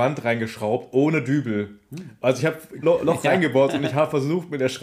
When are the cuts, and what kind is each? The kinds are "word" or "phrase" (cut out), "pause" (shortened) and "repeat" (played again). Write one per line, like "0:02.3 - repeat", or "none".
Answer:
0:02.8 - word